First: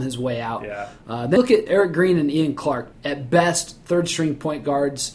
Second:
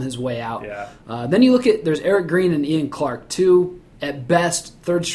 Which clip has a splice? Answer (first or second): first